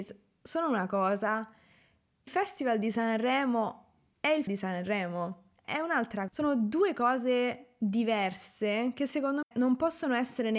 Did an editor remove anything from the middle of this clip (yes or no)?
yes